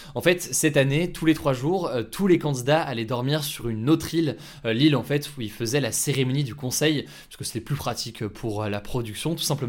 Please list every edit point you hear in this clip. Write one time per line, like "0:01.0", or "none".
none